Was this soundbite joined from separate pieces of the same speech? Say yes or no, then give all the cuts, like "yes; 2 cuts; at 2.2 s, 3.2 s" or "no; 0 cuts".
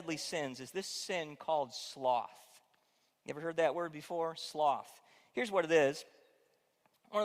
no; 0 cuts